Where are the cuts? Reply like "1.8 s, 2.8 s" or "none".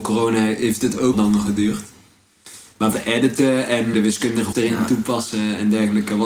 1.1 s, 2.9 s, 3.9 s, 4.5 s